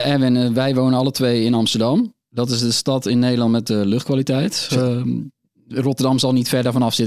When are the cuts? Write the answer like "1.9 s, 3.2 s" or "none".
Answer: 3.7 s, 5.4 s